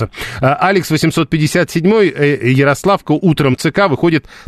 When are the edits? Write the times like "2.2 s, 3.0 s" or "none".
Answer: 3.5 s

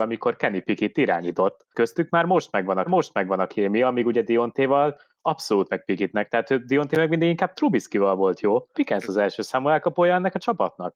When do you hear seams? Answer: 1.7 s, 2.9 s, 5.7 s, 8.7 s

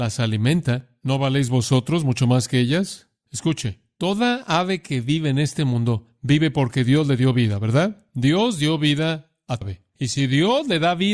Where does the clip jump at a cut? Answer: 9.6 s

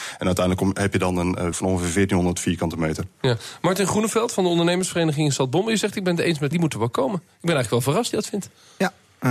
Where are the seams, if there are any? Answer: 1.5 s, 6.5 s, 8.1 s

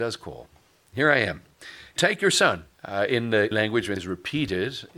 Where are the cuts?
2.0 s, 2.7 s, 3.5 s, 4.0 s

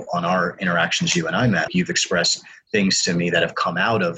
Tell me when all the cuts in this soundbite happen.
1.7 s

